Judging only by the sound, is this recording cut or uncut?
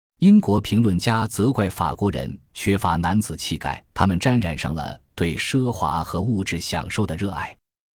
cut